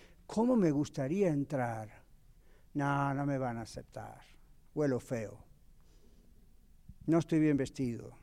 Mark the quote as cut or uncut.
uncut